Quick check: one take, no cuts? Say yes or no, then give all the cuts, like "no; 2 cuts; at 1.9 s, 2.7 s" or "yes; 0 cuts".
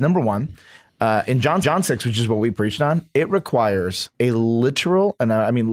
no; 2 cuts; at 1.6 s, 4.1 s